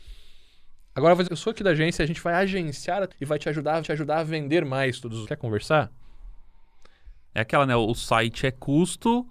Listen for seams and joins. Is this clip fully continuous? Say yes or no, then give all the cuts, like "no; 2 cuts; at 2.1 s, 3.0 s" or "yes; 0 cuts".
no; 4 cuts; at 1.3 s, 3.1 s, 3.8 s, 5.2 s